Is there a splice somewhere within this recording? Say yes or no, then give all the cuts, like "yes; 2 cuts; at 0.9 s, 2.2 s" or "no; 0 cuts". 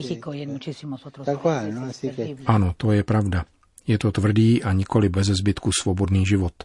no; 0 cuts